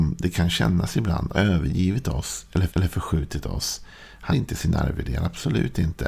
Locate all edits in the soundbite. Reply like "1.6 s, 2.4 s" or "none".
1.3 s, 2.7 s, 4.3 s